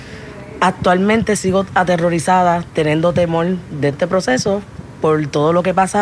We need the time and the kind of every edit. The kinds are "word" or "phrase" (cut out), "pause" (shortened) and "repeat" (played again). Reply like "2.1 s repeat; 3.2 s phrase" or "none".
3.9 s word